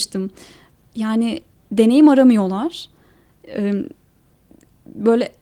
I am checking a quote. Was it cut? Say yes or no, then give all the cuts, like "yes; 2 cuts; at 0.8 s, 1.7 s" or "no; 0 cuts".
no; 0 cuts